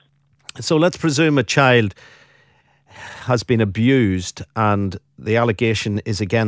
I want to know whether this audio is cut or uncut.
uncut